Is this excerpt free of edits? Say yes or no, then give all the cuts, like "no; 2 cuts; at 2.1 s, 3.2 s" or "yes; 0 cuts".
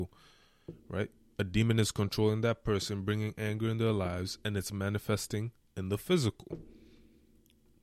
yes; 0 cuts